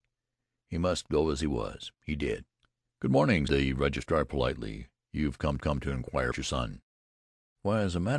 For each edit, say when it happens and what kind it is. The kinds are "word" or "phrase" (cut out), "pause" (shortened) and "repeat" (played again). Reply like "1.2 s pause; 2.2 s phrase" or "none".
1.9 s pause; 2.6 s pause; 3.5 s word; 5.6 s repeat; 6.3 s word